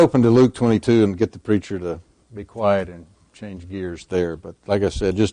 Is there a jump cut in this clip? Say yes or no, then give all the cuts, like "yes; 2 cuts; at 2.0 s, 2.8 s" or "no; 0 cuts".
no; 0 cuts